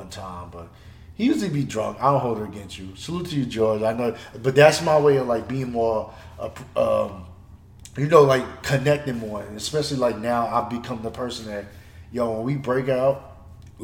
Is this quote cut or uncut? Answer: uncut